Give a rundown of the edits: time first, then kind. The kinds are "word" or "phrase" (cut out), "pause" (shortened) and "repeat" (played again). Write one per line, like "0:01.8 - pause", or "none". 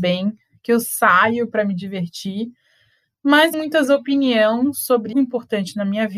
0:03.5 - word
0:03.8 - word
0:05.1 - word